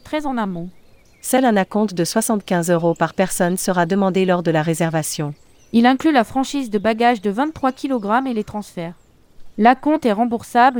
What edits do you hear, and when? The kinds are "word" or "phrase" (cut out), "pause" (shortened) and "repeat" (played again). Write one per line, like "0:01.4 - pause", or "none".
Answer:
none